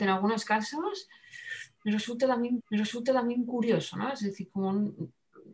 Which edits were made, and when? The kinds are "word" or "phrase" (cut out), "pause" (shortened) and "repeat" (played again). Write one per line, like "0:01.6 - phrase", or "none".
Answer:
0:02.6 - repeat